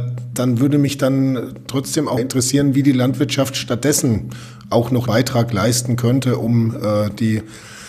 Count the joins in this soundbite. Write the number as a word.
two